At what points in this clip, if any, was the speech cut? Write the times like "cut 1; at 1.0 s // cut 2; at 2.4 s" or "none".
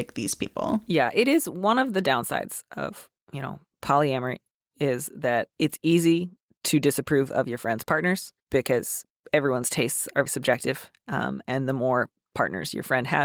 cut 1; at 5.5 s // cut 2; at 6.4 s // cut 3; at 8.4 s // cut 4; at 10.3 s